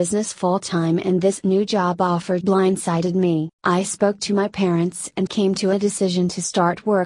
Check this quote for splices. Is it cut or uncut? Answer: cut